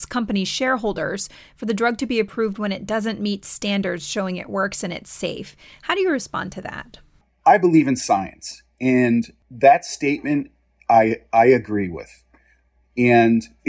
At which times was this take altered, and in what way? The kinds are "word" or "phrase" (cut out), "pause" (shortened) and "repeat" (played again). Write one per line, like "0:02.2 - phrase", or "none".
none